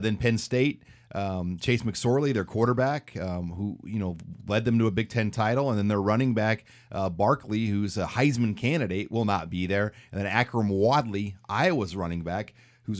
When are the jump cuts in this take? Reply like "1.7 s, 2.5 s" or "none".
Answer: none

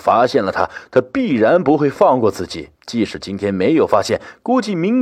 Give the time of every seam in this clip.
2.8 s

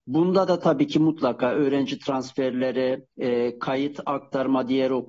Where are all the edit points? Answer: 3.1 s

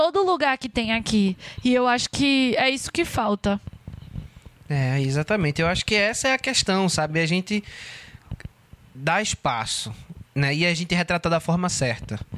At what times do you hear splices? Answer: 10.3 s

